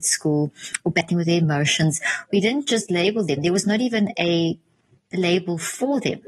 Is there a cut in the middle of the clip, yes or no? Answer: no